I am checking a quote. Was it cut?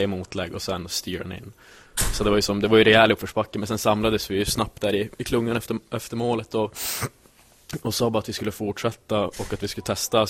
no; 0 cuts

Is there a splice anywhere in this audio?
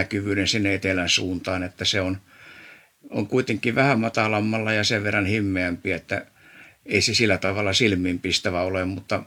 no; 0 cuts

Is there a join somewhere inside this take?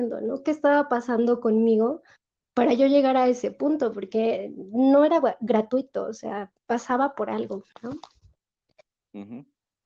no; 0 cuts

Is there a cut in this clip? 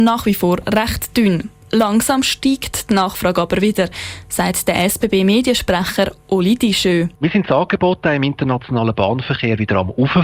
yes; 1 cut; at 7.2 s

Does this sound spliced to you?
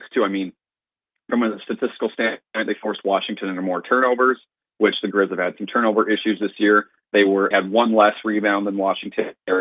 yes; 1 cut; at 7.5 s

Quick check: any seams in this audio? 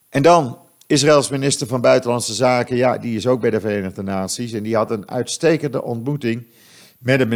no; 0 cuts

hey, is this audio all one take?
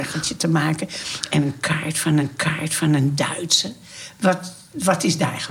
no; 1 cut; at 2.2 s

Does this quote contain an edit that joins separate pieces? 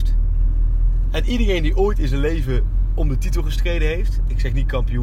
no; 0 cuts

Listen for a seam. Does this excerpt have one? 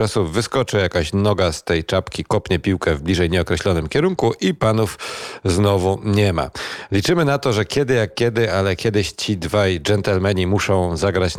no; 0 cuts

